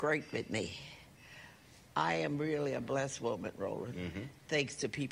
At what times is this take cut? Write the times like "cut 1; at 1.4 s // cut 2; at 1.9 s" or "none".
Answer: none